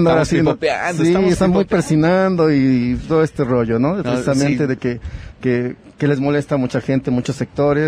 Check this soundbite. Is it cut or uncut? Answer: uncut